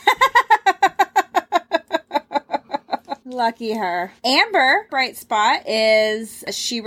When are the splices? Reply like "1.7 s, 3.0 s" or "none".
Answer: 3.2 s, 4.9 s